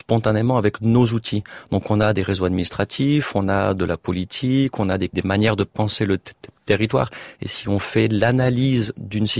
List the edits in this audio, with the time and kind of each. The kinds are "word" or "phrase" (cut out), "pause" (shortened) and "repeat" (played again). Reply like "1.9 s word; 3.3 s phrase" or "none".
5.1 s word